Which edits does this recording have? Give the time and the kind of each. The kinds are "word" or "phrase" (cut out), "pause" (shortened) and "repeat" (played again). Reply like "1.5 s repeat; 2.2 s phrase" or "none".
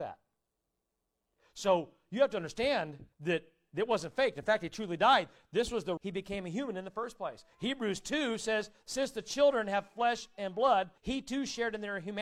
3.1 s pause; 6.0 s word; 11.0 s pause